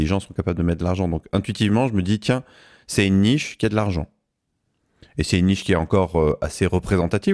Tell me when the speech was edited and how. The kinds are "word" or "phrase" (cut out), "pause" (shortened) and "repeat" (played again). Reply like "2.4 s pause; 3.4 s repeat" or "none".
none